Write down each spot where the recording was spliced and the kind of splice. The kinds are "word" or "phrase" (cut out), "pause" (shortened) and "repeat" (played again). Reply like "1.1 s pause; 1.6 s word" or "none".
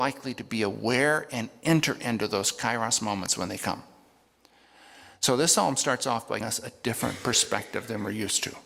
6.4 s word